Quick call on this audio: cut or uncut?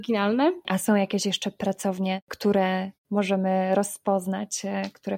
uncut